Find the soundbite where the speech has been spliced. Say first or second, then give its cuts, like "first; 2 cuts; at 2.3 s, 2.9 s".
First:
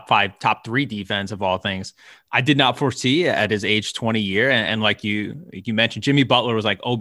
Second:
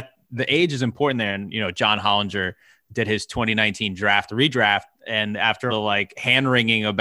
second; 1 cut; at 5.7 s